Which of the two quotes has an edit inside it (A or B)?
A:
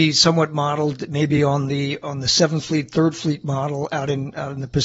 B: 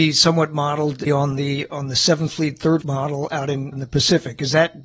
B